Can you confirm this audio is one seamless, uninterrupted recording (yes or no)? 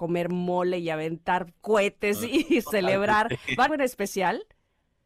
no